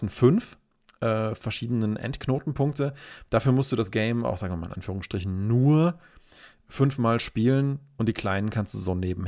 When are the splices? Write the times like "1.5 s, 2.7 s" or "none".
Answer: 6.6 s